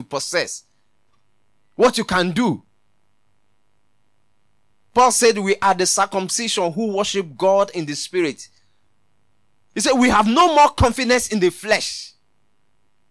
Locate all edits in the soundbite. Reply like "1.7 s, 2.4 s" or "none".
none